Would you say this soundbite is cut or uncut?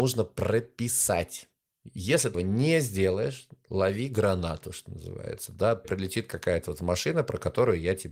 cut